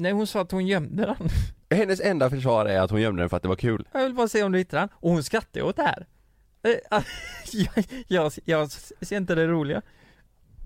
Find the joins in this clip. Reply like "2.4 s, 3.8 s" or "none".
1.6 s